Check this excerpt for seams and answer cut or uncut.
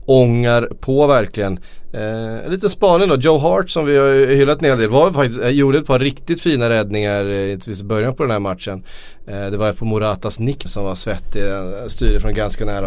cut